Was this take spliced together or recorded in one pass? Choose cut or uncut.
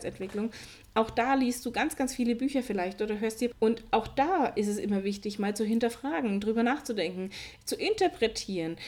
cut